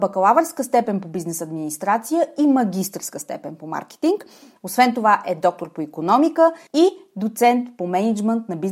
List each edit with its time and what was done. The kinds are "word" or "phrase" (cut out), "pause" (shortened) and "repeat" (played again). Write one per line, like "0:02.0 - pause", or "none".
0:06.7 - pause